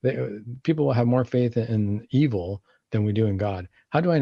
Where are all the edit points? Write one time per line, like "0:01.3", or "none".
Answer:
none